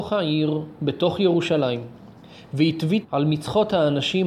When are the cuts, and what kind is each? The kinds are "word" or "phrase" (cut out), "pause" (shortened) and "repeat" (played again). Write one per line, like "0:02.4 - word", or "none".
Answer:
0:03.0 - word